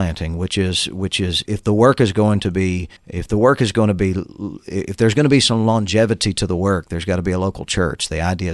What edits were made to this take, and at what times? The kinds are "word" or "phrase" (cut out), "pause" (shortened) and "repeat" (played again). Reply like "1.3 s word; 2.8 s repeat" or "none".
1.5 s word; 3.0 s pause